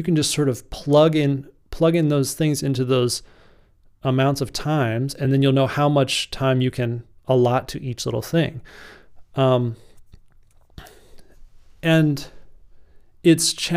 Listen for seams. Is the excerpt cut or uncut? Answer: uncut